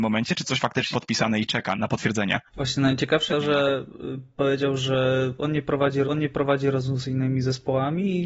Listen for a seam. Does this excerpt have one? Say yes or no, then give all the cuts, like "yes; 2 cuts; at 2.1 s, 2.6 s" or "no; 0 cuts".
yes; 6 cuts; at 0.9 s, 1.7 s, 2.5 s, 3.3 s, 4.3 s, 6.0 s